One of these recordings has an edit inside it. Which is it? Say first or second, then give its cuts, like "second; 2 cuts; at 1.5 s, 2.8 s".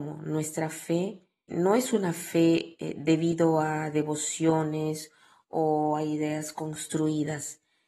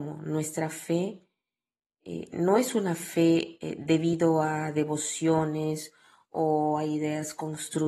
first; 1 cut; at 1.5 s